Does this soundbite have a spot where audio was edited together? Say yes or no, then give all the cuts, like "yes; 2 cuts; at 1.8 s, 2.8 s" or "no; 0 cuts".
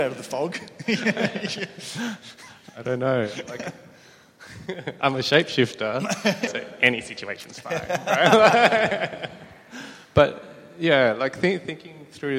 yes; 1 cut; at 6.5 s